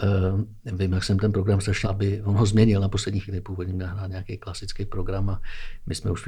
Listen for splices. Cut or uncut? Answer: cut